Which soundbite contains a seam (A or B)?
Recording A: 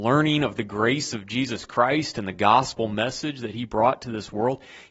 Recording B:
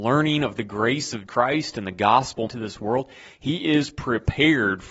B